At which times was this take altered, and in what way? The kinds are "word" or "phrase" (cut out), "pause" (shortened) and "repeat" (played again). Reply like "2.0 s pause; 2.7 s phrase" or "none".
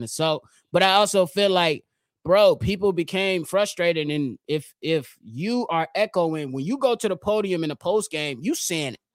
none